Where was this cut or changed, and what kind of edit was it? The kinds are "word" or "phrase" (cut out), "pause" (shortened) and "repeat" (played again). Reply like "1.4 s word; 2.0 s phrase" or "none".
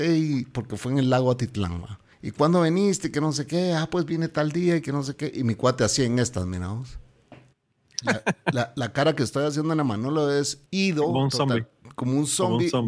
2.1 s pause; 7.5 s pause; 10.7 s pause